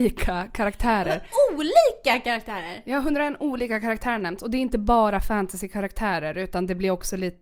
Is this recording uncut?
yes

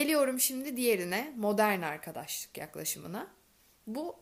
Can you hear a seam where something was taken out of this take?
no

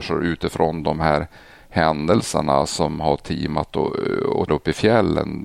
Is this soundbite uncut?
no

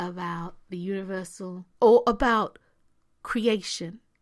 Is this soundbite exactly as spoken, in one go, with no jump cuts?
no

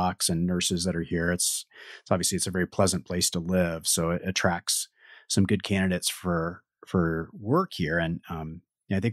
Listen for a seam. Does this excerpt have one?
no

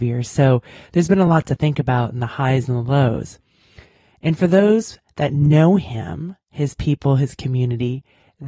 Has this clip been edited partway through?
no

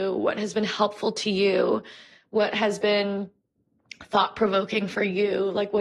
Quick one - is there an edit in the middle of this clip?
no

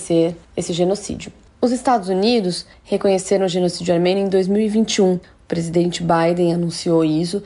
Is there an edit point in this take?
no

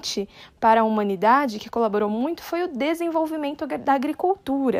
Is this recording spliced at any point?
no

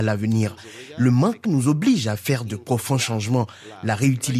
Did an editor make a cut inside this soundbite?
yes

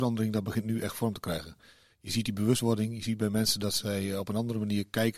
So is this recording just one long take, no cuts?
yes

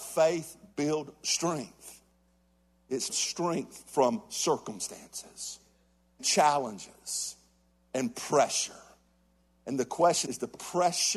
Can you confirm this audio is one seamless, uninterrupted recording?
no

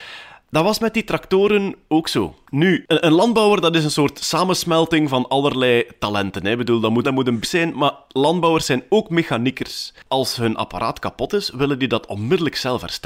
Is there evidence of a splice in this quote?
yes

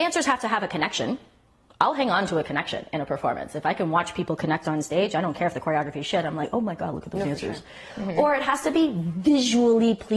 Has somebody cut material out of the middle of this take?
no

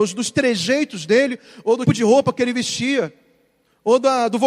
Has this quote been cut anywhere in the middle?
yes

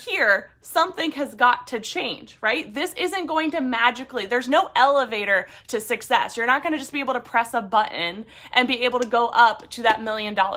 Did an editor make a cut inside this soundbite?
no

